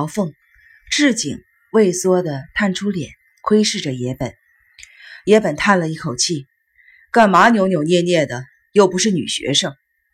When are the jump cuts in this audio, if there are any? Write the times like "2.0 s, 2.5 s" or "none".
none